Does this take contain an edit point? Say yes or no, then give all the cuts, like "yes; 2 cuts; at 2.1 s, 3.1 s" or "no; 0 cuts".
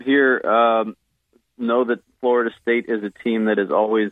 no; 0 cuts